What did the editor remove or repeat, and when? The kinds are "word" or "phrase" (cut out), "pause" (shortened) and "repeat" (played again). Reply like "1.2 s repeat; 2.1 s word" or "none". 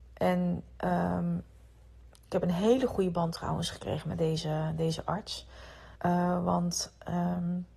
6.0 s pause